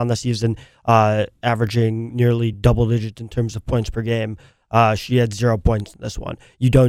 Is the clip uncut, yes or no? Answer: yes